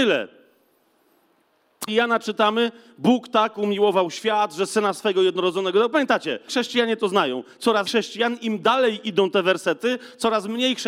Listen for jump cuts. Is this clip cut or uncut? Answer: cut